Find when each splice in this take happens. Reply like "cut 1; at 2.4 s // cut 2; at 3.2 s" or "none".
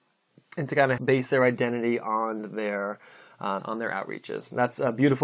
cut 1; at 1.0 s // cut 2; at 3.6 s